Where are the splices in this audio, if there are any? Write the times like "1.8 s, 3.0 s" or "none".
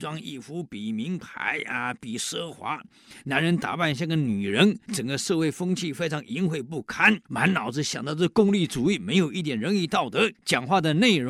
4.8 s, 7.2 s, 10.3 s

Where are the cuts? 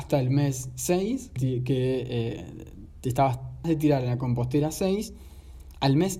1.4 s, 3.6 s

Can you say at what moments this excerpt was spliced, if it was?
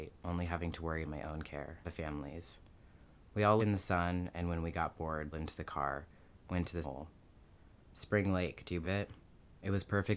1.0 s, 1.8 s, 3.6 s, 5.3 s, 6.8 s, 8.8 s

